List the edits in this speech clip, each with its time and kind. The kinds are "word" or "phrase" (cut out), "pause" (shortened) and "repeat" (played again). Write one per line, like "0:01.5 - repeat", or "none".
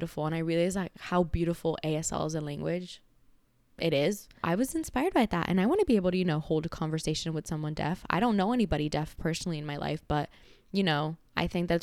0:04.4 - word